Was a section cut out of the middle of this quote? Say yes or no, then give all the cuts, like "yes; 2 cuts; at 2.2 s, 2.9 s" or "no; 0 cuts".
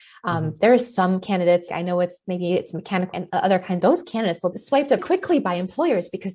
yes; 5 cuts; at 1.7 s, 3.1 s, 3.8 s, 4.5 s, 5.0 s